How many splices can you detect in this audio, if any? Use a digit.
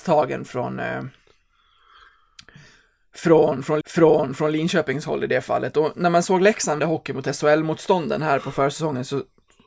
2